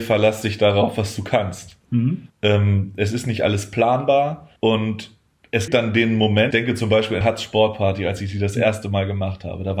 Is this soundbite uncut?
no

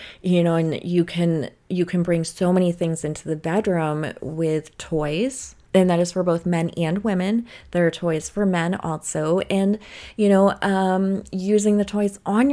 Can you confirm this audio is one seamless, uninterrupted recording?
yes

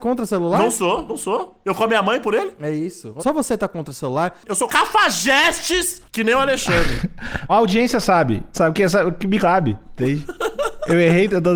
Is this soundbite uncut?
no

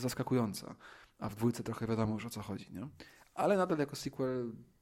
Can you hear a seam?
no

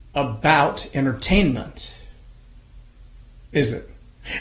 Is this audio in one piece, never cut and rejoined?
yes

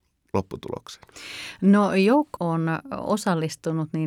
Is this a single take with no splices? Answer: no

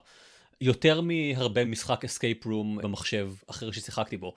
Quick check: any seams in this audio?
yes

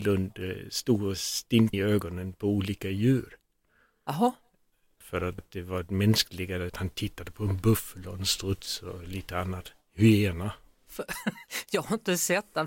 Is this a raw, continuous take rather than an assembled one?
no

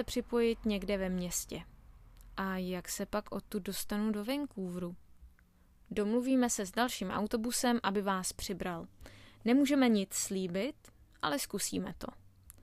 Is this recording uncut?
yes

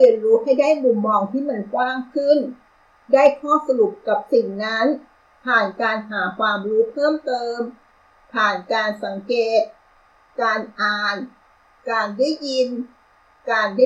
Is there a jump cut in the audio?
no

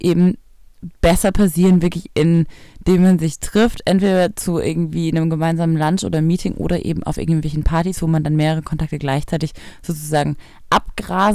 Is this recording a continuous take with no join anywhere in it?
yes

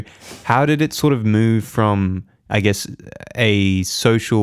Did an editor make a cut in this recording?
no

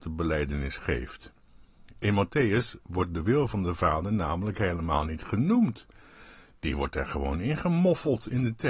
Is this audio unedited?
yes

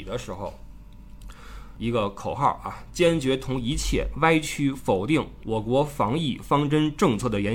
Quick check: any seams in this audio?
yes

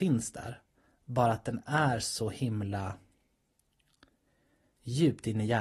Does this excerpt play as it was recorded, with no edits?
yes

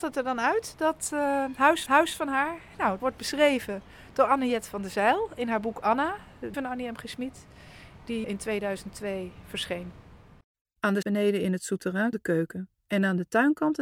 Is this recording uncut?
no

